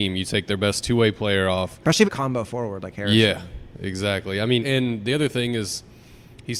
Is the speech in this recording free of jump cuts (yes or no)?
no